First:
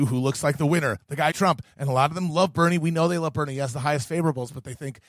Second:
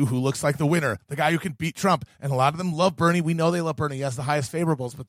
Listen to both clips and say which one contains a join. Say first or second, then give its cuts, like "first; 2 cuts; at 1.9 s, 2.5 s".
first; 1 cut; at 1.3 s